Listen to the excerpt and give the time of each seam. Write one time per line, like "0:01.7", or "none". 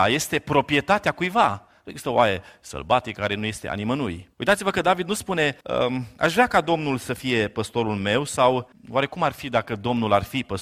0:04.3
0:05.6
0:08.7